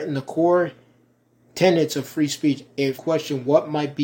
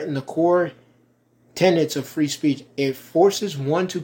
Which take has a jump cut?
first; 1 cut; at 3.0 s

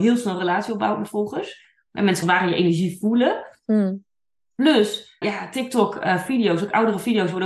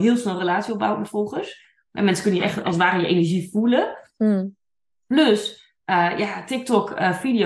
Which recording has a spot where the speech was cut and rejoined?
first; 2 cuts; at 2.2 s, 5.2 s

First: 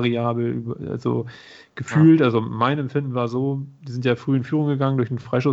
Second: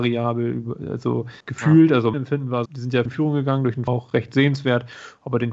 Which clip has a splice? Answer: second; 5 cuts; at 1.4 s, 2.1 s, 2.7 s, 3.1 s, 3.9 s

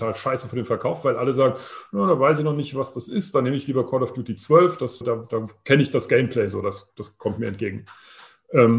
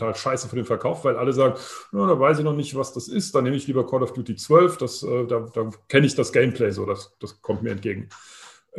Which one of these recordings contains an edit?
first; 1 cut; at 5.0 s

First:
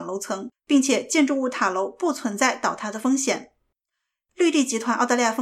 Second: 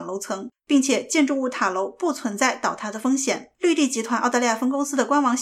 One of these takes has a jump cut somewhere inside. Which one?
second; 1 cut; at 3.5 s

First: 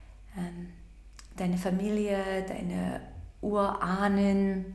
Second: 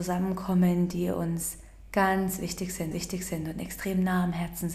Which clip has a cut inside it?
second; 1 cut; at 2.9 s

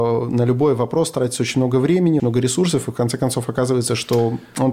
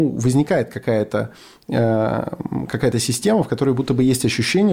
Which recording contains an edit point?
first; 1 cut; at 2.2 s

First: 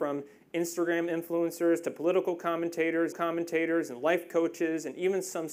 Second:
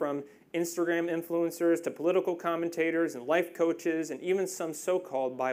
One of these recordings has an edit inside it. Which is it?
first; 1 cut; at 3.1 s

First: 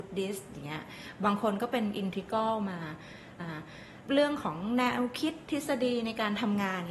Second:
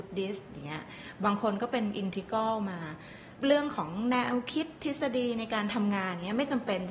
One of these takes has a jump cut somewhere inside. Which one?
first; 1 cut; at 3.4 s

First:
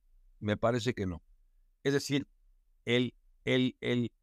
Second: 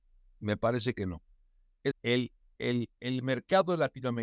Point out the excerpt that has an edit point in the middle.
second; 2 cuts; at 1.9 s, 2.6 s

